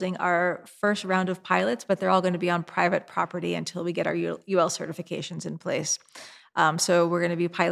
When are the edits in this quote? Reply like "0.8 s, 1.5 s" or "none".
none